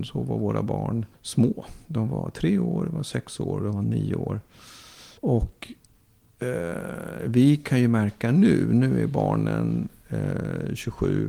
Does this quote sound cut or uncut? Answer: cut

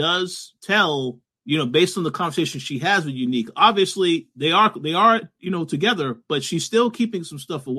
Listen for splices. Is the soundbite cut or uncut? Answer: cut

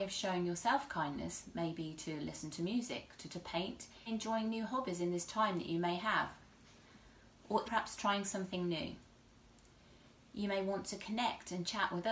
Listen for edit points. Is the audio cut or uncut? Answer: cut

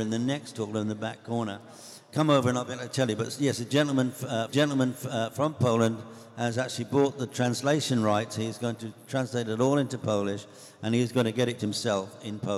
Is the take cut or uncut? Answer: cut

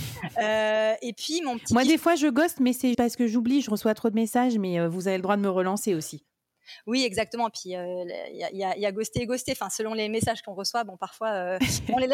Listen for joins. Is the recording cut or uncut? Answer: cut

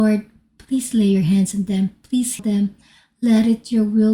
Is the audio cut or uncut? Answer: cut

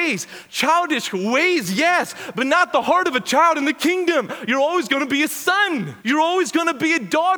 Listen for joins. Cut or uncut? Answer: cut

